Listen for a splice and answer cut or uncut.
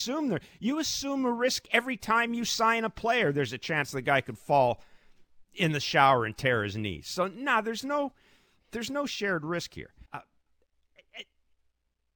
cut